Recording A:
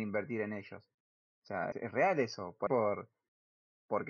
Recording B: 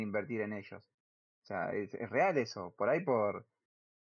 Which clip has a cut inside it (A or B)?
A